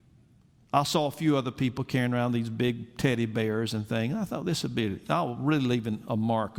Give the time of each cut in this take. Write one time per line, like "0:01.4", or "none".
none